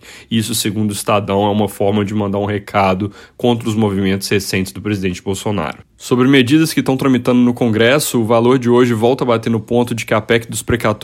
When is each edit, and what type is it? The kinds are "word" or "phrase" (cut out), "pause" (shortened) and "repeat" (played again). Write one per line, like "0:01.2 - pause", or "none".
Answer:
none